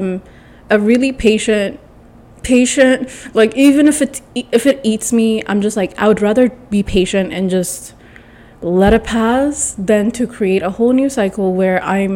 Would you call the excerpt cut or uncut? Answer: uncut